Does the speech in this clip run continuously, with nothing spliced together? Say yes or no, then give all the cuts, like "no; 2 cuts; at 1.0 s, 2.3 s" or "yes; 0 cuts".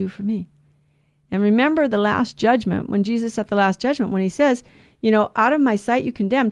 yes; 0 cuts